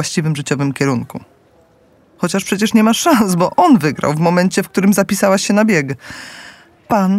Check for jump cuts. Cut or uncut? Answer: uncut